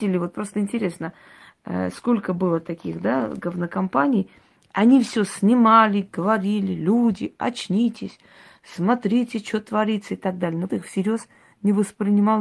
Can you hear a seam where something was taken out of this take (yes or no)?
yes